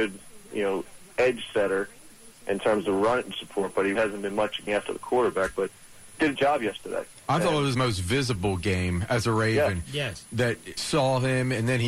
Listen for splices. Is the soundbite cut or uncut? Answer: cut